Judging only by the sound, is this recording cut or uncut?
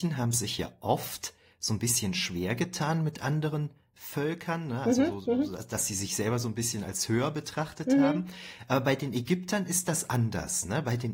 uncut